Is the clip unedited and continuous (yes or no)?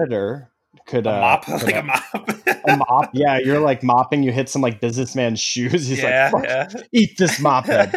yes